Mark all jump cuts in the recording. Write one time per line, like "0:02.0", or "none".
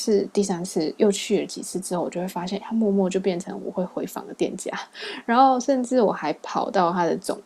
0:02.6